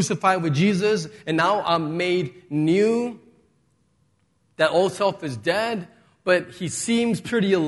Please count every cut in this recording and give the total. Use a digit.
0